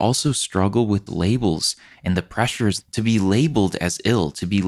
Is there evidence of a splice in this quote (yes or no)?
yes